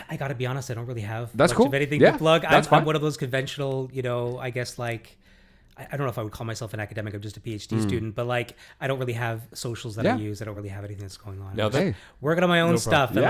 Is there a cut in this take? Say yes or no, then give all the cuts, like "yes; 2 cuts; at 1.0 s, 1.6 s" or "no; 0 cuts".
no; 0 cuts